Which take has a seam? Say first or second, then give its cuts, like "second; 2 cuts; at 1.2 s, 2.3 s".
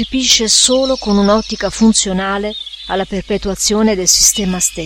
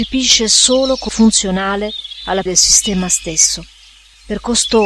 second; 2 cuts; at 1.1 s, 2.5 s